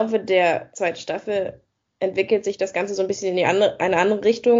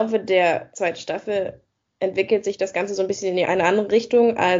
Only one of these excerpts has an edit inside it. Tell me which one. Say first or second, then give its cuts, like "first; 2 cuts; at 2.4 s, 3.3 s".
second; 1 cut; at 3.4 s